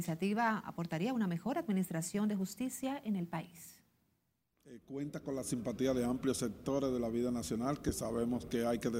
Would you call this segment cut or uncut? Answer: uncut